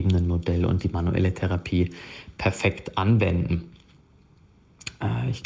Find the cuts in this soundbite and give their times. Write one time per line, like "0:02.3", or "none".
none